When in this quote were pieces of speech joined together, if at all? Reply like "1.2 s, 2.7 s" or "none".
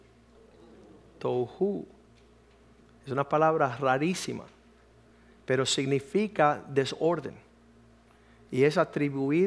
none